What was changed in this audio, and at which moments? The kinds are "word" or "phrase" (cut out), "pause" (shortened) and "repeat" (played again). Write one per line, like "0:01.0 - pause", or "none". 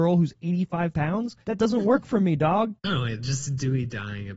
0:00.9 - word
0:01.4 - pause
0:02.8 - word
0:03.2 - word

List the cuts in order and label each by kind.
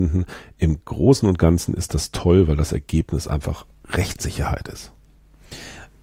0:03.7 - pause

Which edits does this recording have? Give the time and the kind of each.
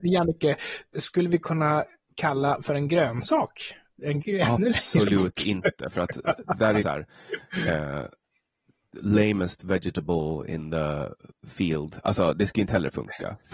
0:02.6 - word
0:04.2 - word
0:06.8 - word

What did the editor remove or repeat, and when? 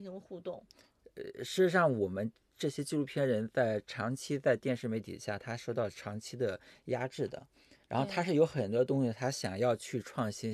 0:07.8 - pause

